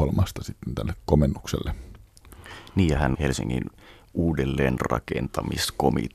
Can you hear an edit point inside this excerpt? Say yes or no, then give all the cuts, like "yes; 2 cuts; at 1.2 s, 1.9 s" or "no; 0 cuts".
yes; 1 cut; at 3.1 s